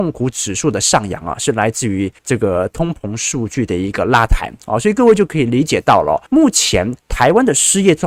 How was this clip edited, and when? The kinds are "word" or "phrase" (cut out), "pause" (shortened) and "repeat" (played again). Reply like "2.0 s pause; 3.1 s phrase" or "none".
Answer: 2.2 s pause; 6.3 s pause

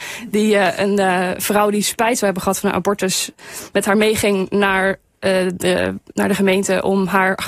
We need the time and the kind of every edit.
none

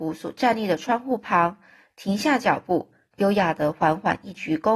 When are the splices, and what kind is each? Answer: none

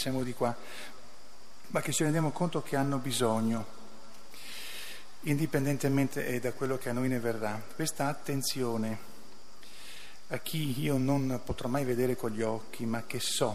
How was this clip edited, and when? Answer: none

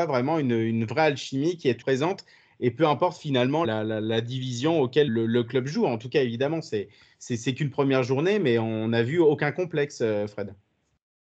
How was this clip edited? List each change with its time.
1.8 s word; 3.6 s word; 5.1 s word

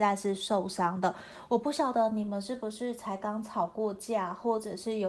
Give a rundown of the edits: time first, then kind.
none

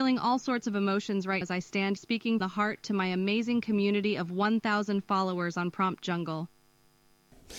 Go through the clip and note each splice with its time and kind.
1.4 s word; 2.0 s word; 2.4 s word

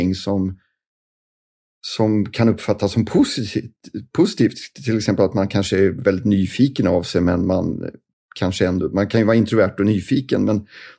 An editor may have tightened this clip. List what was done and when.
8.1 s pause

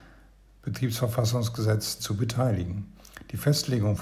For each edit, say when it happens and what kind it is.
2.0 s word

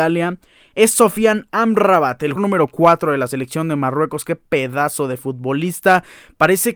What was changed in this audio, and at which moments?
2.4 s word

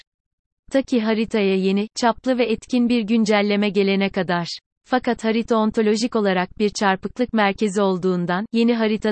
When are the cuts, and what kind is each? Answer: 4.8 s pause

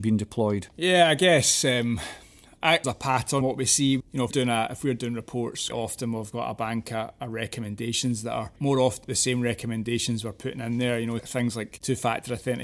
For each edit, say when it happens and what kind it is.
2.8 s phrase; 3.4 s word; 4.0 s word; 4.3 s word; 5.7 s word; 9.0 s phrase; 11.2 s word

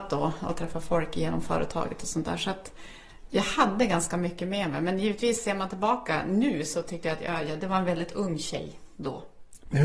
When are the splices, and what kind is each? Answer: none

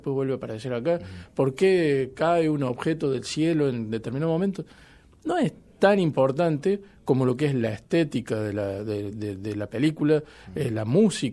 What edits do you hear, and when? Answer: none

